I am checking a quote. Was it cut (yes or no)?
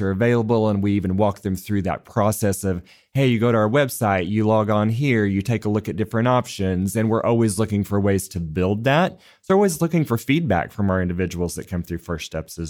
no